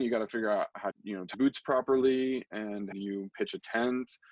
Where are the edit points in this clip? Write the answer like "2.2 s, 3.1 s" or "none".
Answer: 0.9 s, 1.3 s, 2.9 s